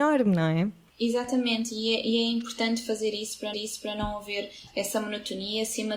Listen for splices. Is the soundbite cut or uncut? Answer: cut